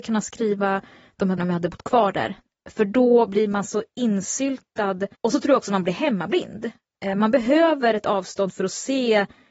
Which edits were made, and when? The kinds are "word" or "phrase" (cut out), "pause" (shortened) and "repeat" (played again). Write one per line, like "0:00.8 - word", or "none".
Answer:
0:01.4 - word
0:05.1 - pause